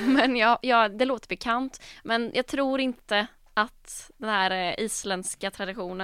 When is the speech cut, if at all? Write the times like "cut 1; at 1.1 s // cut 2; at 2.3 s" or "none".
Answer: none